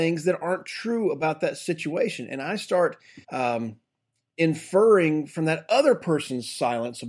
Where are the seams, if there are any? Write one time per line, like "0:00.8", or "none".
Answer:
0:03.2

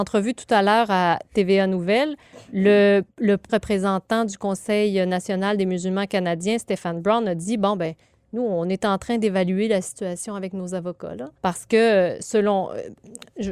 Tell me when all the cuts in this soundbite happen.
0:03.5
0:11.4

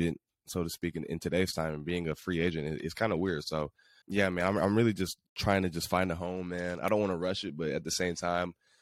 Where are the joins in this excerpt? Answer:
0:04.0
0:05.3

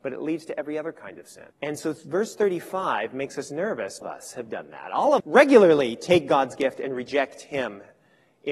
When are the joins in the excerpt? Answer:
0:01.5
0:04.0
0:05.2

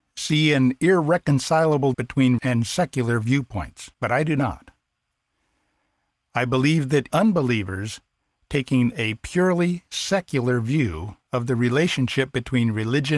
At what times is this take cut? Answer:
0:01.9
0:02.4
0:03.9
0:07.1

